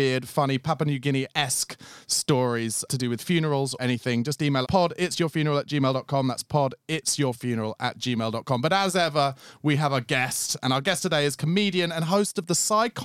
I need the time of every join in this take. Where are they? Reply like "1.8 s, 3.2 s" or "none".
2.9 s, 3.8 s, 4.6 s